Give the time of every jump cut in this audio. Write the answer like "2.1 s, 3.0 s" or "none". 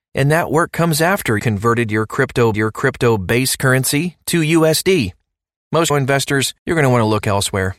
1.4 s, 2.5 s, 5.9 s, 6.6 s